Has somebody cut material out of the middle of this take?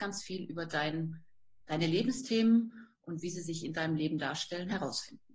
no; 0 cuts

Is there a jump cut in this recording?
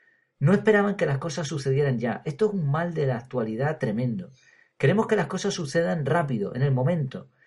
no; 0 cuts

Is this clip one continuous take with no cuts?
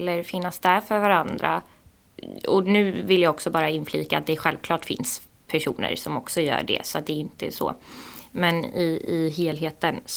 yes; 0 cuts

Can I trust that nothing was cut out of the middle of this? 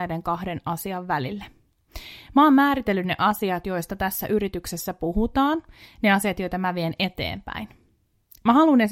yes; 0 cuts

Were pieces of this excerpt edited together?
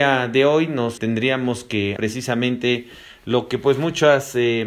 yes; 2 cuts; at 1.0 s, 2.0 s

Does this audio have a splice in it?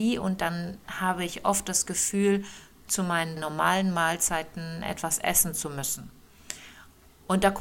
yes; 2 cuts; at 2.9 s, 3.4 s

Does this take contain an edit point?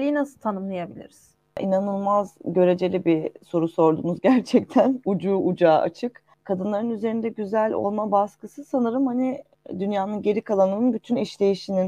no; 0 cuts

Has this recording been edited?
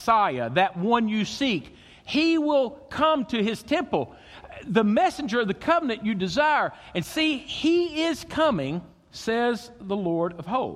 no; 0 cuts

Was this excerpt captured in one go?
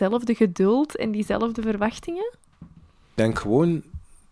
yes; 0 cuts

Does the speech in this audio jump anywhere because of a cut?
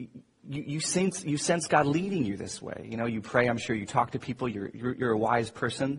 yes; 1 cut; at 4.7 s

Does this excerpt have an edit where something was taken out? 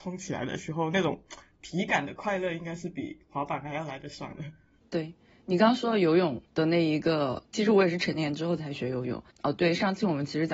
yes; 1 cut; at 6.5 s

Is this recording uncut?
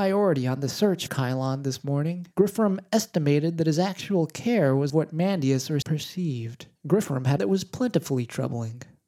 no; 6 cuts; at 1.1 s, 2.3 s, 4.9 s, 5.8 s, 6.8 s, 7.4 s

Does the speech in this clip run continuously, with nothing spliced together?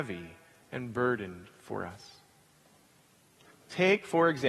yes; 0 cuts

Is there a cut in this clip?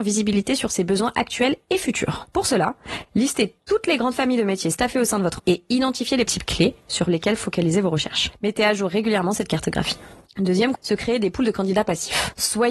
yes; 3 cuts; at 5.4 s, 6.3 s, 10.7 s

